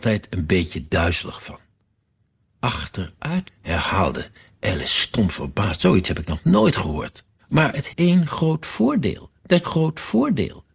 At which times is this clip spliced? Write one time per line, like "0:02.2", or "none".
0:03.5
0:05.8
0:07.4
0:07.9
0:09.6